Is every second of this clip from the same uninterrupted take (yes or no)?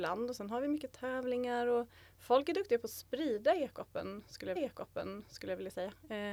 no